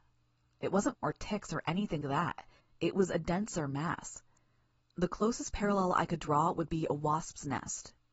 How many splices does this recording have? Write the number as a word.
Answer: three